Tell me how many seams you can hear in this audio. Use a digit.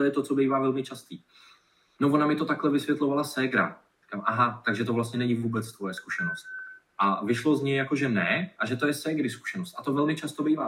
0